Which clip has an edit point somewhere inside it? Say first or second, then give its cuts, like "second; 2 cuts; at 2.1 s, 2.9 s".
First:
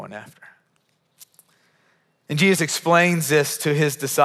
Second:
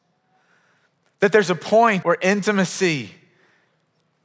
second; 1 cut; at 2.0 s